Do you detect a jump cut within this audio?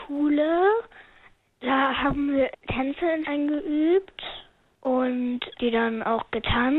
yes; 3 cuts; at 2.5 s, 3.2 s, 5.5 s

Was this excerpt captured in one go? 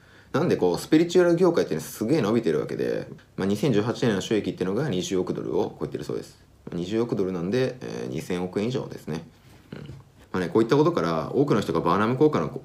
yes; 0 cuts

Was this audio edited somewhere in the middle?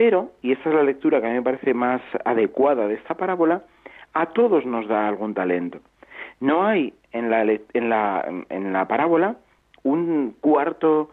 no; 0 cuts

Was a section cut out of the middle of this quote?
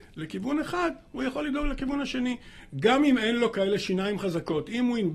no; 0 cuts

